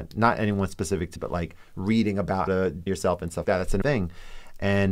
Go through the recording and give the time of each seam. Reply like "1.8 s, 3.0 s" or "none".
1.2 s, 2.5 s, 2.9 s, 3.4 s, 3.8 s

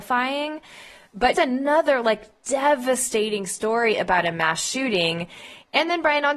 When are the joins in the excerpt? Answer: 1.3 s

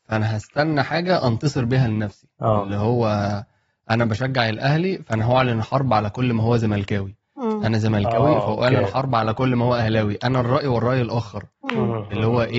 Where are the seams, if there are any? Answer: none

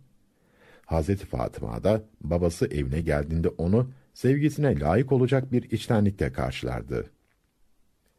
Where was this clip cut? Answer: none

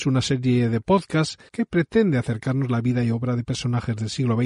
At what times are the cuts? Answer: 1.5 s

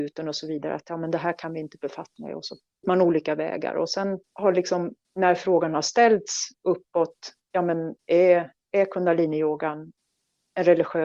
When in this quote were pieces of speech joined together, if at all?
2.2 s, 2.8 s, 4.2 s, 5.0 s, 7.4 s, 8.0 s

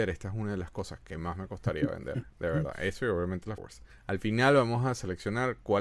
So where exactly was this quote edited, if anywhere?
3.6 s, 3.9 s

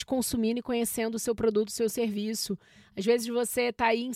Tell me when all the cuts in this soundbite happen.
none

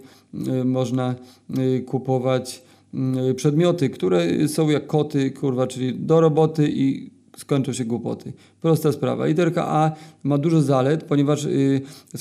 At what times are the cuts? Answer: none

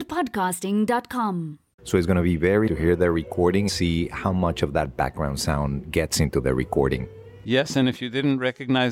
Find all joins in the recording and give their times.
2.7 s, 3.7 s

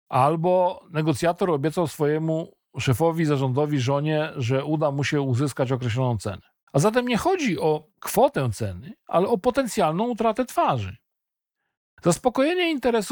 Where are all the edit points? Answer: 6.6 s, 7.9 s

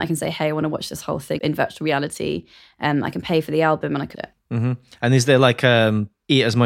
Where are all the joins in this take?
1.4 s, 4.1 s

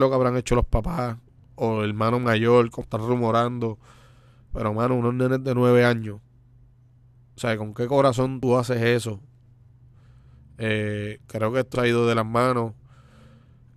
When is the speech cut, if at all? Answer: none

